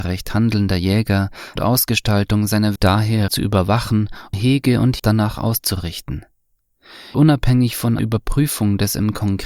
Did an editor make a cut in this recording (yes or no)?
yes